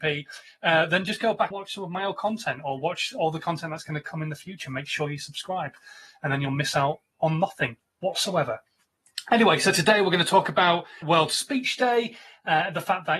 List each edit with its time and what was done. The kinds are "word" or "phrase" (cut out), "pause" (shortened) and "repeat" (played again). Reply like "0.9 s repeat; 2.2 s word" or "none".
1.5 s word; 11.0 s word